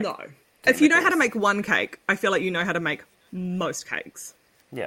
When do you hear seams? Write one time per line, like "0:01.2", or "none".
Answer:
none

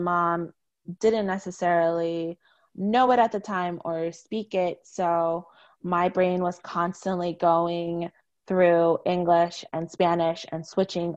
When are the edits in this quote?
none

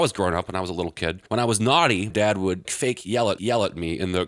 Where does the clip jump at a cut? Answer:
0:01.3
0:02.1
0:02.6
0:03.4

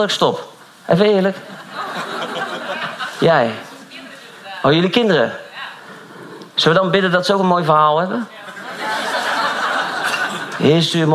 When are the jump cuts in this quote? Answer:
0:06.5

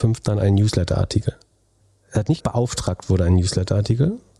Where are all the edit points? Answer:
0:01.8
0:02.4

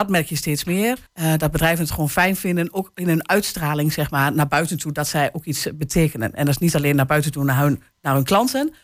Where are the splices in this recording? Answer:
0:01.1

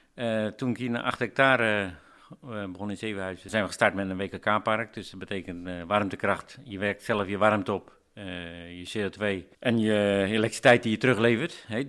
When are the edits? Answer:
0:09.5

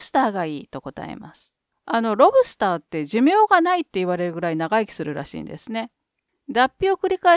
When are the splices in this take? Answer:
0:01.7

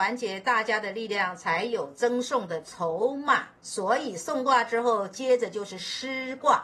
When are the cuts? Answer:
0:03.6

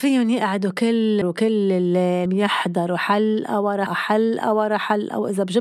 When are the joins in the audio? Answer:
0:01.2
0:02.3
0:03.9

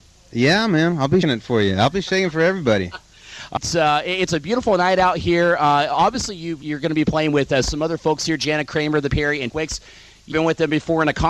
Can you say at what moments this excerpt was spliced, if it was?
0:01.2
0:03.6
0:06.6
0:09.1
0:09.5
0:10.3

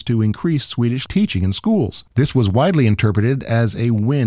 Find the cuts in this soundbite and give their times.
0:01.1
0:02.1

